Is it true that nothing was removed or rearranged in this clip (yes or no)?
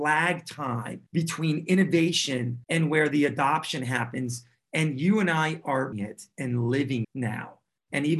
no